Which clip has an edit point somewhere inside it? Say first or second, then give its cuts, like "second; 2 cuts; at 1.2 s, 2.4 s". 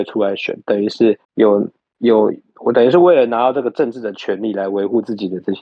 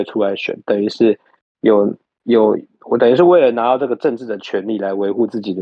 first; 1 cut; at 1.2 s